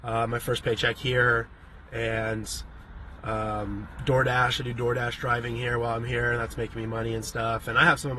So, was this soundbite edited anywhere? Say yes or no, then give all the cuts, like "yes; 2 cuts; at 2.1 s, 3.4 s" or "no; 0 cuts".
no; 0 cuts